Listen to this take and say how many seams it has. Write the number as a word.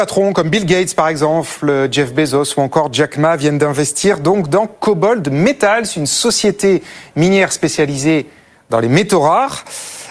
zero